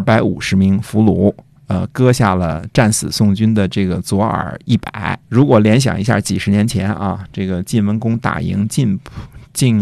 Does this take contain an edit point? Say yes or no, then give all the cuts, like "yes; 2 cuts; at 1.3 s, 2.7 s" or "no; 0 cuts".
yes; 1 cut; at 5.2 s